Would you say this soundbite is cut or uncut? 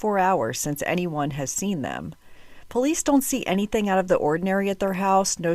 uncut